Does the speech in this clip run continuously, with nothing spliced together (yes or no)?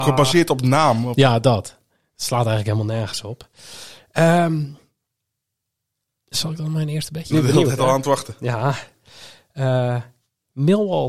no